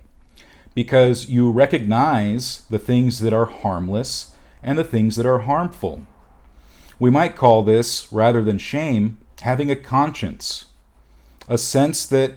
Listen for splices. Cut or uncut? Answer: uncut